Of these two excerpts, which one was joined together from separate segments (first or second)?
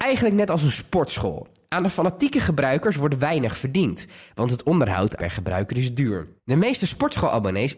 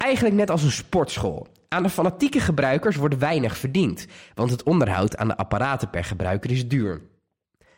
first